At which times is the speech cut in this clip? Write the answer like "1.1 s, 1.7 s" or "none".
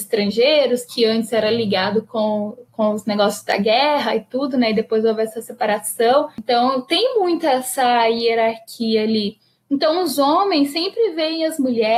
2.7 s